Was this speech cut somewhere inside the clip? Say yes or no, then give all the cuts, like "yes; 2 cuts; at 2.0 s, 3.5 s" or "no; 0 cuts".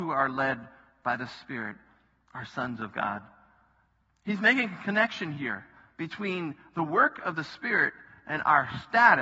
no; 0 cuts